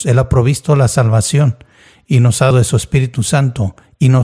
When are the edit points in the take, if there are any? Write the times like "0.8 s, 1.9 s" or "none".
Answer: 2.5 s